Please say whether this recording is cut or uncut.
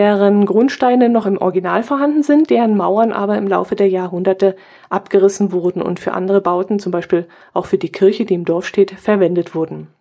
uncut